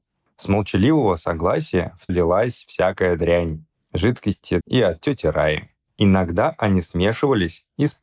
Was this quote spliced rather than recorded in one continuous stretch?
yes; 2 cuts; at 2.1 s, 4.6 s

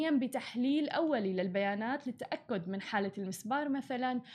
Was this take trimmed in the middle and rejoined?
no; 0 cuts

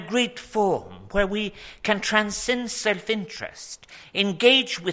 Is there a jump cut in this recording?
no; 0 cuts

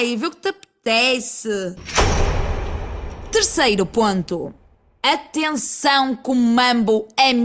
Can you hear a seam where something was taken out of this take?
no; 0 cuts

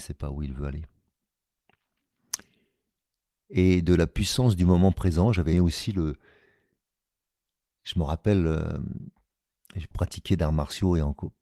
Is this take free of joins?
no; 2 cuts; at 5.5 s, 9.9 s

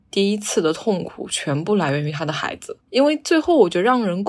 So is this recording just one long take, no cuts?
no; 1 cut; at 2.8 s

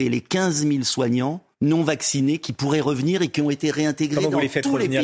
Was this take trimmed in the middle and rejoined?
yes; 1 cut; at 1.5 s

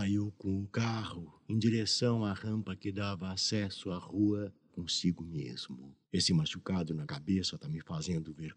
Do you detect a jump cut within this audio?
yes; 3 cuts; at 4.7 s, 6.0 s, 7.0 s

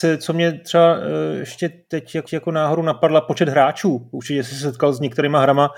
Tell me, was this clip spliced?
yes; 1 cut; at 2.3 s

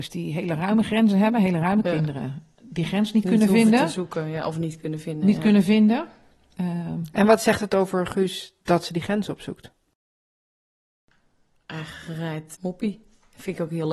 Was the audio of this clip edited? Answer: yes; 3 cuts; at 1.8 s, 8.6 s, 12.6 s

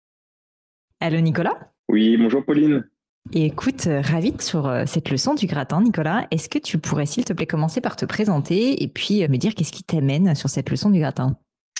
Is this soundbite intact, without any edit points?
no; 3 cuts; at 1.8 s, 4.4 s, 9.3 s

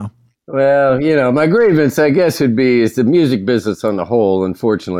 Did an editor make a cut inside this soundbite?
no; 0 cuts

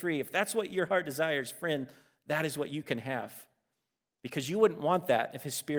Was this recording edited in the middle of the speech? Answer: no; 0 cuts

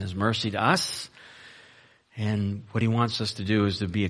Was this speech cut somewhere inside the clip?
no; 0 cuts

